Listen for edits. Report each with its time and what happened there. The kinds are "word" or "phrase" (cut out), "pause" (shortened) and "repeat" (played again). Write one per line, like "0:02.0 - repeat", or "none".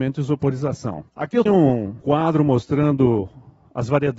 0:01.1 - pause
0:01.5 - word
0:02.0 - word